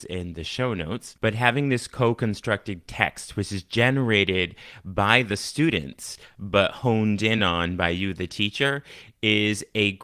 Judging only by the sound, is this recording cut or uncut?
uncut